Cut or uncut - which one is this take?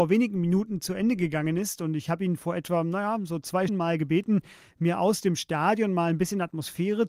cut